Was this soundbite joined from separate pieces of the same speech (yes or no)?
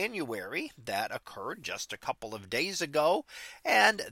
no